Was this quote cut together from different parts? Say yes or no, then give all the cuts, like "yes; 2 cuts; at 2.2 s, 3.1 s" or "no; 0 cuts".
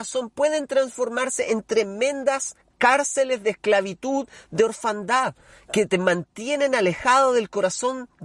no; 0 cuts